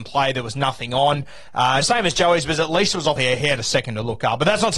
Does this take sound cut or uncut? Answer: cut